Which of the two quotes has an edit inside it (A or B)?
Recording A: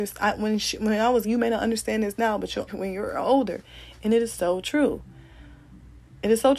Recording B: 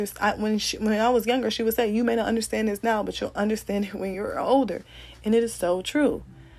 A